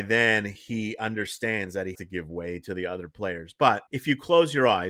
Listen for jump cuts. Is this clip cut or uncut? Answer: cut